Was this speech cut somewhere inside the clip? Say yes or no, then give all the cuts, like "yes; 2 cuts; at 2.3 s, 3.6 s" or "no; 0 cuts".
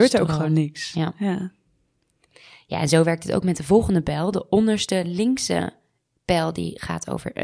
no; 0 cuts